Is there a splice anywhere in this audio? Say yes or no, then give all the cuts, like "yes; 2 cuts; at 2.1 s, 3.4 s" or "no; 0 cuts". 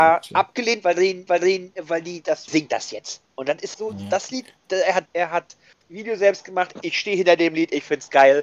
yes; 8 cuts; at 1.3 s, 2.5 s, 3.3 s, 3.7 s, 4.6 s, 5.1 s, 5.8 s, 6.7 s